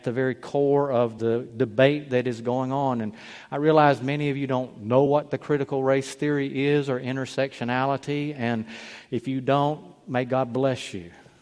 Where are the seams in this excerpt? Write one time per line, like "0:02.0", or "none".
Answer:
none